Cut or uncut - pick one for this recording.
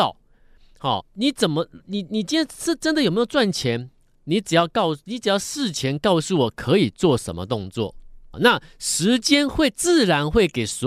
cut